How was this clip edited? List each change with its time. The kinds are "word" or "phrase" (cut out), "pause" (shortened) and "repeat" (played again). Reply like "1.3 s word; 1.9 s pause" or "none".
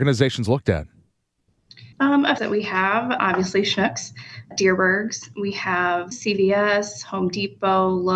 1.9 s pause; 2.4 s phrase; 3.2 s word; 4.5 s word; 6.1 s phrase